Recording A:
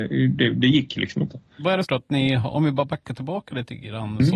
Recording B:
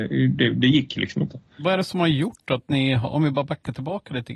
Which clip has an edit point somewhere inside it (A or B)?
A